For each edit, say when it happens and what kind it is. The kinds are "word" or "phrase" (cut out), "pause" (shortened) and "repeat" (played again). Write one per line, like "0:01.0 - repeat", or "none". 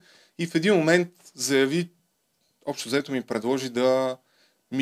none

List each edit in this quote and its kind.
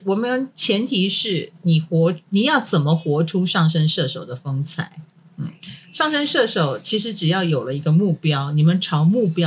none

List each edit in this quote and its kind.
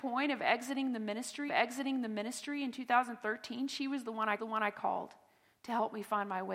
0:01.5 - repeat
0:04.4 - repeat

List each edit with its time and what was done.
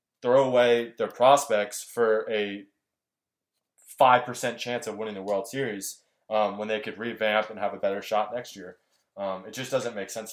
none

